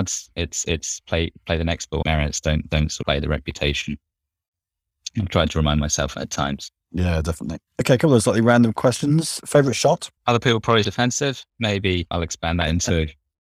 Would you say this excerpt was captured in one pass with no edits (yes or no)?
no